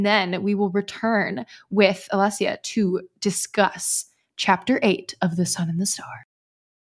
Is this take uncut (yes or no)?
yes